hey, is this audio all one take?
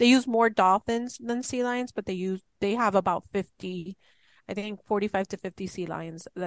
yes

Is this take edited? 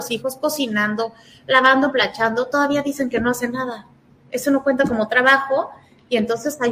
no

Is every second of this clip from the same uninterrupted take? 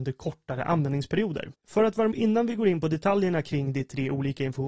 no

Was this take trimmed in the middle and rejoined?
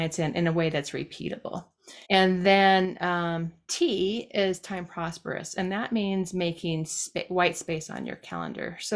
yes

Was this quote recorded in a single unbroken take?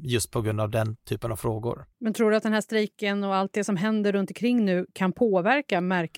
no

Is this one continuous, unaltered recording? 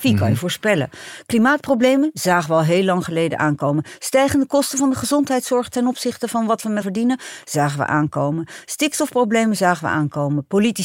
no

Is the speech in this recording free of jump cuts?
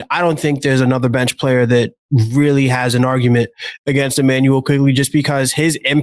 yes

